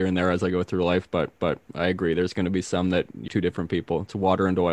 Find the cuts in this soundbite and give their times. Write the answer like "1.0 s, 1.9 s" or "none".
1.4 s, 3.3 s